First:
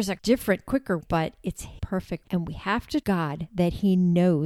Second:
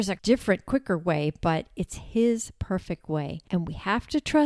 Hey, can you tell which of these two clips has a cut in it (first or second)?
first